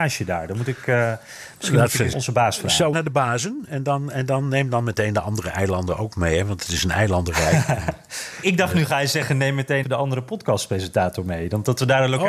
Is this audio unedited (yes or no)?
no